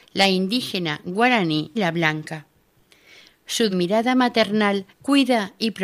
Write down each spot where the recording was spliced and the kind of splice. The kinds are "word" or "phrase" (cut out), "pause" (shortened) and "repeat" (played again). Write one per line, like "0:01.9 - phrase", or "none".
0:01.8 - word
0:03.7 - word
0:04.9 - pause